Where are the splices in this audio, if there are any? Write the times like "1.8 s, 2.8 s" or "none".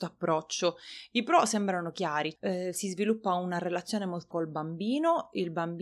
2.4 s, 4.3 s